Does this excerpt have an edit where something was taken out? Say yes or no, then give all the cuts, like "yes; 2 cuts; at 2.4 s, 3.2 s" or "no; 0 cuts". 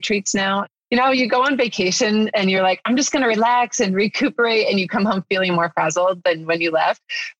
no; 0 cuts